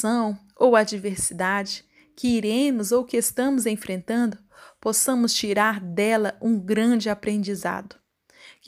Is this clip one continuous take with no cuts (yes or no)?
yes